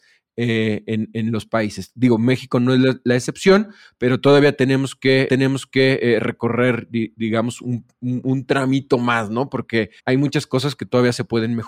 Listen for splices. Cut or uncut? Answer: cut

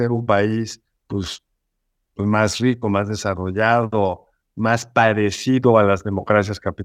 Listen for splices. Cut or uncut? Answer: uncut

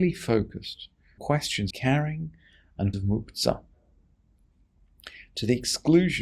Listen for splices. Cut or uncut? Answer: cut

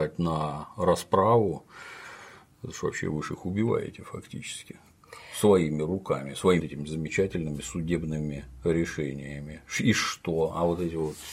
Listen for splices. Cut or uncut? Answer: cut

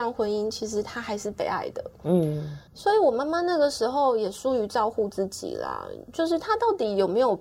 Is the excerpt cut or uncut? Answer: cut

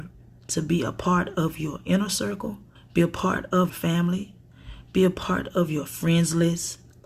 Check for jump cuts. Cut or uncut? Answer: cut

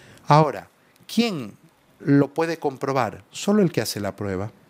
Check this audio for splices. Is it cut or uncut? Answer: uncut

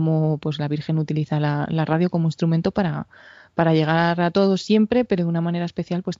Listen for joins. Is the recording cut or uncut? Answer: uncut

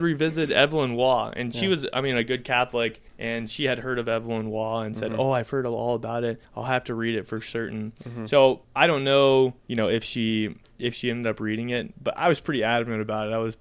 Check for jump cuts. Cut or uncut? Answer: cut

